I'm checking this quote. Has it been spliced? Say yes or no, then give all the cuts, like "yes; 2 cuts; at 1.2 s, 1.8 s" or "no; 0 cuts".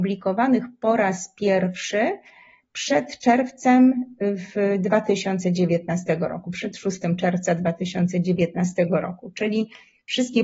no; 0 cuts